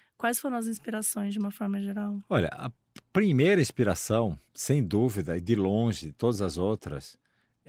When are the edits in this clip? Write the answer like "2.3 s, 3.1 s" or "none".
4.5 s